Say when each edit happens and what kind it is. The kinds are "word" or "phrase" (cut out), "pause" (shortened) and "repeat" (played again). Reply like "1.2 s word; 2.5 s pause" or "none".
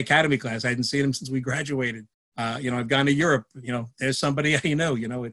2.1 s pause